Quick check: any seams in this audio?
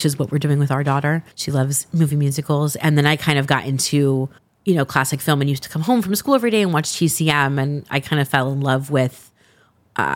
yes; 2 cuts; at 1.3 s, 4.4 s

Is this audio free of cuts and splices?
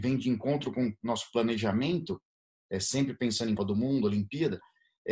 no; 1 cut; at 3.6 s

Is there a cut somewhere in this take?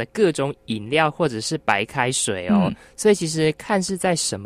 no; 0 cuts

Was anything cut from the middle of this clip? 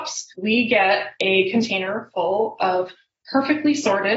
no; 0 cuts

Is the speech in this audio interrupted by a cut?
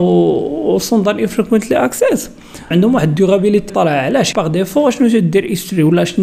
yes; 3 cuts; at 2.7 s, 3.7 s, 4.3 s

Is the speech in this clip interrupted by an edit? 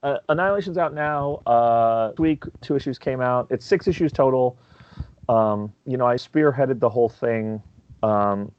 yes; 4 cuts; at 2.2 s, 2.6 s, 5.8 s, 6.2 s

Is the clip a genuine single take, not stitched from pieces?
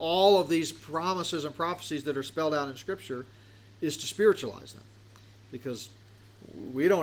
yes; 0 cuts

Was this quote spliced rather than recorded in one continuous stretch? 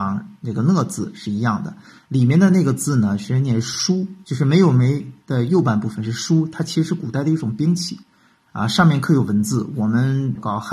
no; 0 cuts

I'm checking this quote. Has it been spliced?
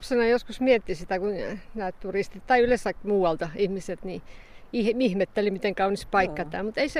no; 0 cuts

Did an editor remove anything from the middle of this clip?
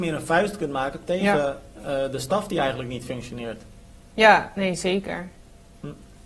no; 0 cuts

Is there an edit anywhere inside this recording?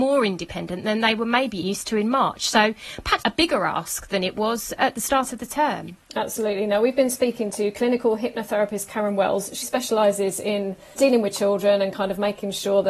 yes; 5 cuts; at 1.6 s, 3.2 s, 4.8 s, 9.6 s, 10.9 s

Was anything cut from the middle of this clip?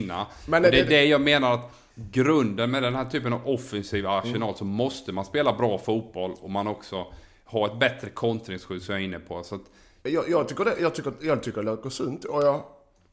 yes; 1 cut; at 1.9 s

